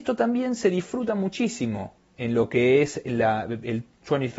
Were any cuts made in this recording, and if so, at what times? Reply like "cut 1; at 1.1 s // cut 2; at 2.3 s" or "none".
none